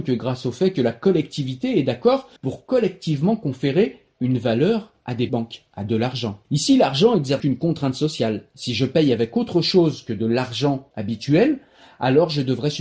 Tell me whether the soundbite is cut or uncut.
cut